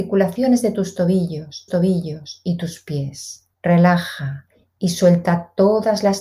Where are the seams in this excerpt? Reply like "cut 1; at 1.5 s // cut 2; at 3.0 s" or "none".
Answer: cut 1; at 1.7 s // cut 2; at 3.5 s